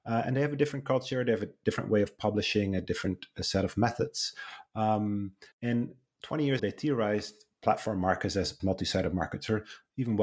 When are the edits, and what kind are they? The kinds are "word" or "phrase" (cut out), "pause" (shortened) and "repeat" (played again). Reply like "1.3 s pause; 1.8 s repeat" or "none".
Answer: 5.5 s pause; 6.6 s word; 8.6 s word